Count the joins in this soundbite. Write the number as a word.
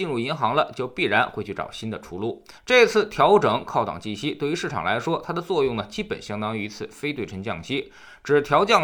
one